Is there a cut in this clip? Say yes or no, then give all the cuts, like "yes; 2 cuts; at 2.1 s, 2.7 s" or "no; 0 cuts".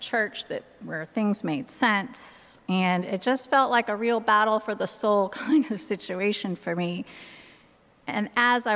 no; 0 cuts